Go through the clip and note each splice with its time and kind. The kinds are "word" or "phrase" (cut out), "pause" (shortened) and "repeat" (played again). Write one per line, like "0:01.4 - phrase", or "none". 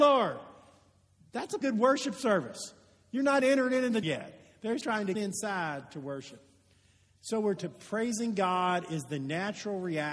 0:01.6 - word
0:03.4 - word
0:04.0 - word
0:04.8 - word
0:05.1 - word
0:07.6 - word